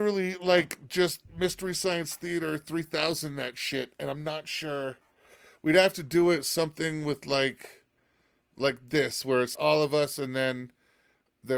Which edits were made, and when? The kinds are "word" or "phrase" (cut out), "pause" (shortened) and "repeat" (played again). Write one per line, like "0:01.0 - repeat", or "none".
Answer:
0:09.5 - word